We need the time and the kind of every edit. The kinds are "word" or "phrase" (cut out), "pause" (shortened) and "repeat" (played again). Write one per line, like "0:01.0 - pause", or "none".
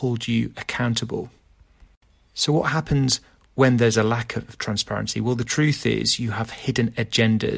none